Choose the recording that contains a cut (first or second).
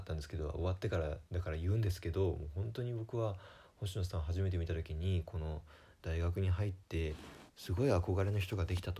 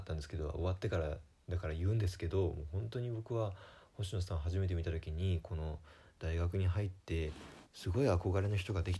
first